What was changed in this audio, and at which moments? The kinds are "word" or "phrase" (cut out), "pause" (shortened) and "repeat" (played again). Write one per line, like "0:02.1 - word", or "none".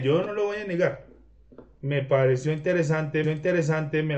0:03.2 - repeat